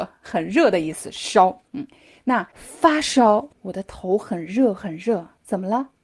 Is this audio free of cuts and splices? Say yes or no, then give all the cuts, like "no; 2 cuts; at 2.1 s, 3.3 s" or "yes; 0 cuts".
no; 3 cuts; at 1.7 s, 2.5 s, 3.5 s